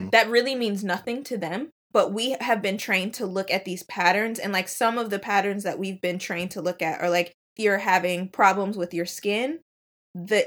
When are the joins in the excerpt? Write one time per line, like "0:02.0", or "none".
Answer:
0:01.9
0:07.6

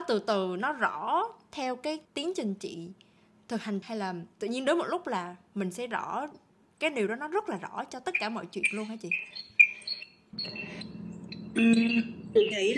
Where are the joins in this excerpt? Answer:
0:02.0
0:03.8
0:04.3

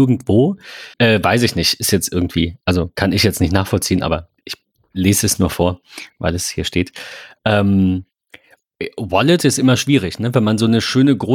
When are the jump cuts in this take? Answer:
0:00.9
0:04.4

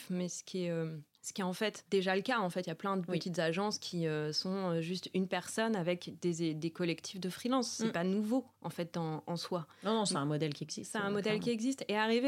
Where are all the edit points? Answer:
0:08.5

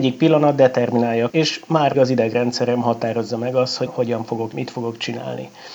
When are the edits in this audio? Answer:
0:01.3
0:01.9
0:03.9
0:04.5

